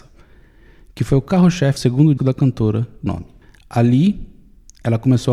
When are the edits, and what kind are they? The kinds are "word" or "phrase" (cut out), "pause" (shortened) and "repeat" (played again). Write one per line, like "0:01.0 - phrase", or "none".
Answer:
0:01.8 - word
0:02.2 - word
0:03.1 - word